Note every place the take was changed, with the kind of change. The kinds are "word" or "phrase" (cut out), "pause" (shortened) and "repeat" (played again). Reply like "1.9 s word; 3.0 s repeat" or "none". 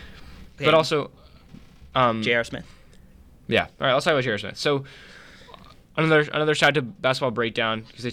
none